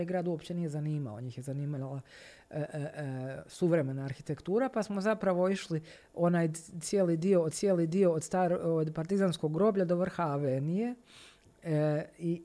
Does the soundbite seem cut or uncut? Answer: cut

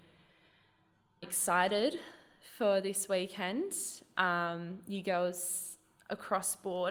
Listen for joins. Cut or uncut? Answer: cut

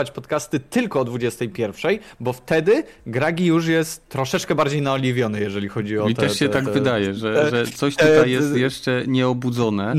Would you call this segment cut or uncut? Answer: uncut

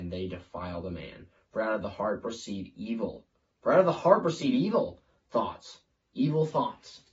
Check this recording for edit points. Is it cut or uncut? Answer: uncut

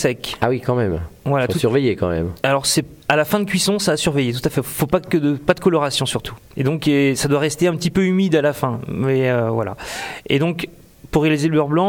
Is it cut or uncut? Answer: uncut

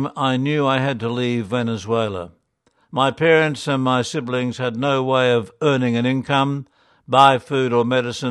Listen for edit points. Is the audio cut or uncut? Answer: uncut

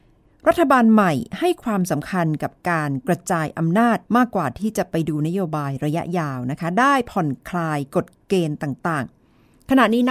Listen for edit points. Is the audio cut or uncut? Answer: cut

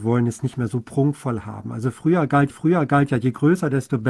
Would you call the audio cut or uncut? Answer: cut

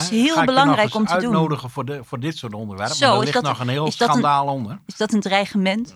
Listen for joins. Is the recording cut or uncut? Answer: uncut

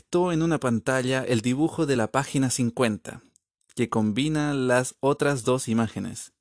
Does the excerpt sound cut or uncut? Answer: uncut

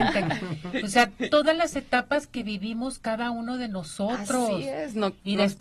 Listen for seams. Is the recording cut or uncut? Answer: uncut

